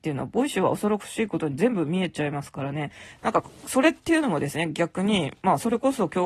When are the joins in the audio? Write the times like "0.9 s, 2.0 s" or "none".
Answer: none